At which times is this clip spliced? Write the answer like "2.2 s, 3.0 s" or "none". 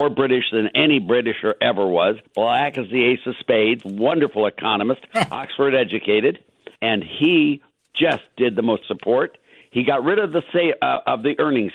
2.3 s, 3.8 s, 6.8 s, 8.8 s, 9.6 s